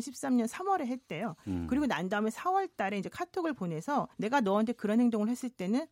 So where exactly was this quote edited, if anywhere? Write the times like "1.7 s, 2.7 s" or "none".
4.1 s